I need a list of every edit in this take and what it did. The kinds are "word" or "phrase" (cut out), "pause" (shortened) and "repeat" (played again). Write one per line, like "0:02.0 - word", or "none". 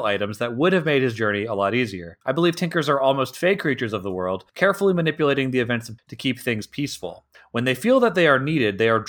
0:02.2 - pause
0:04.5 - pause
0:06.0 - word
0:07.3 - pause